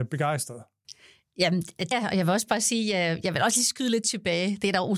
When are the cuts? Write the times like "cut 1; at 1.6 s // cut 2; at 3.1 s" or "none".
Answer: cut 1; at 1.9 s